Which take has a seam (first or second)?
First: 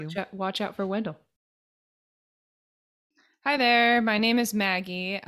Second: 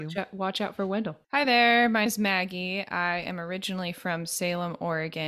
second